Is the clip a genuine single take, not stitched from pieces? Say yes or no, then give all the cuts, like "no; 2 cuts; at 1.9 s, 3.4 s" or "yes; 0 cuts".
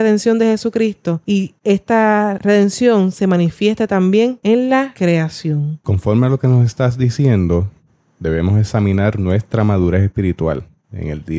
yes; 0 cuts